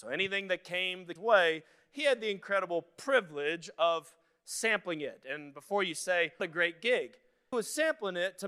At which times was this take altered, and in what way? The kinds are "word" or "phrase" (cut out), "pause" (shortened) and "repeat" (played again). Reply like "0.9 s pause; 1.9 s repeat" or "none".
1.2 s word; 6.4 s word; 7.5 s word